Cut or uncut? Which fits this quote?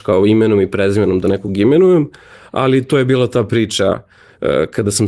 uncut